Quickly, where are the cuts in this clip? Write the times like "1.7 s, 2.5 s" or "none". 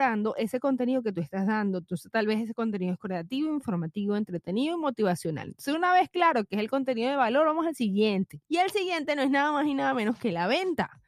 8.4 s

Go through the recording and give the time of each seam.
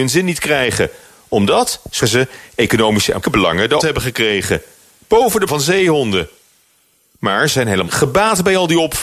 2.0 s, 3.2 s, 3.8 s, 5.5 s, 7.5 s, 7.9 s

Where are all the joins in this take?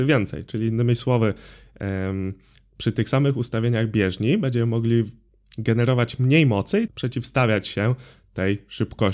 6.9 s

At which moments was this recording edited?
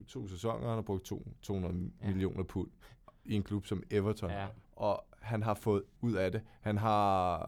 4.6 s, 6.0 s

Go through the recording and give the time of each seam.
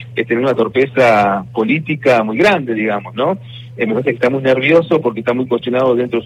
none

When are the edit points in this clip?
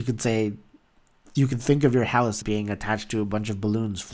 2.4 s

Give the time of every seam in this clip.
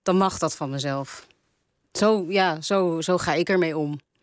none

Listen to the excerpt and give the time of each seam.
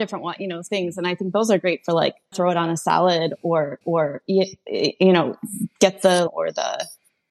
2.3 s, 3.8 s, 6.3 s

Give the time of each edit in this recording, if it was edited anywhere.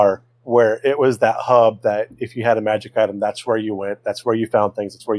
none

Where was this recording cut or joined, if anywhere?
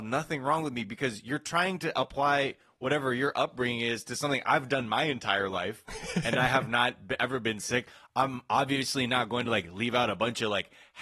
none

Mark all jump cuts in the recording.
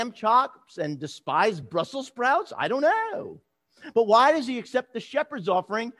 none

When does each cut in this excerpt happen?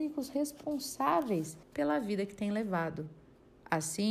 1.6 s

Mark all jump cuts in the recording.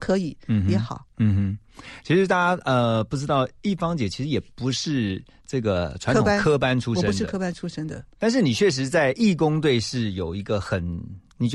none

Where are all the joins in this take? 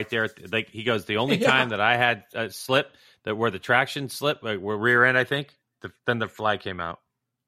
none

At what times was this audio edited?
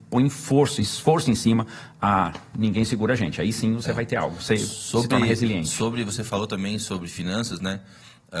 none

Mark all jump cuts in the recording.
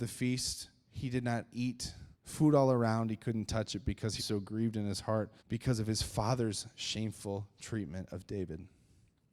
2.1 s, 4.2 s, 5.4 s

